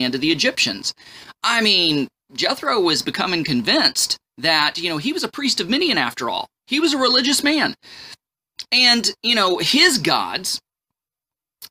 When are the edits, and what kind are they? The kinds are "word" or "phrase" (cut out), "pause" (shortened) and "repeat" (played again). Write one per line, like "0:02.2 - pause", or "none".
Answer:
0:04.3 - pause

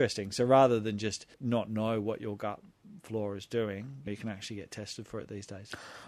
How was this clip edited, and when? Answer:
0:01.3 - pause
0:04.1 - word

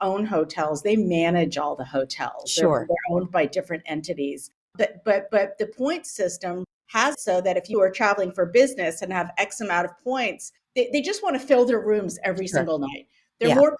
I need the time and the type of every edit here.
0:05.3 - repeat
0:07.1 - word
0:07.7 - phrase

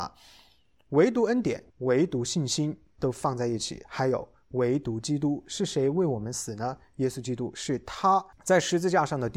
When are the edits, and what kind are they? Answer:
0:01.7 - pause
0:08.3 - pause

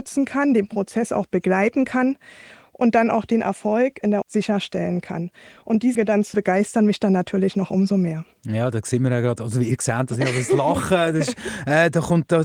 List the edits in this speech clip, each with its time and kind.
0:04.2 - word
0:05.9 - word
0:06.3 - word

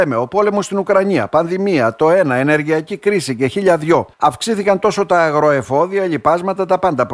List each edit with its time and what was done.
0:04.1 - pause

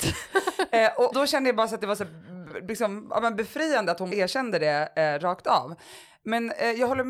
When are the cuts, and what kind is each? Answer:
0:01.1 - word
0:04.1 - word

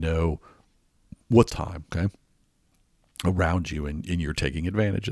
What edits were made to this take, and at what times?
0:01.5 - phrase
0:01.9 - pause

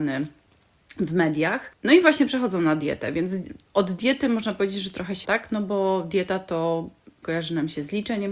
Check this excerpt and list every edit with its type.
0:05.2 - word
0:07.2 - word

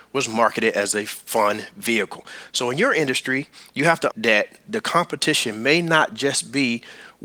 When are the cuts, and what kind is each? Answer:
0:04.1 - word

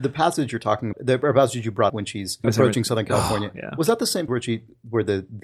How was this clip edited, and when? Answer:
0:00.9 - word
0:01.9 - word
0:02.4 - word
0:04.3 - word

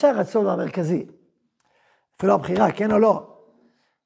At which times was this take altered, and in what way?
none

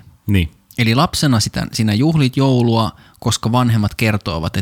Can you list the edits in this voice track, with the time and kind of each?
none

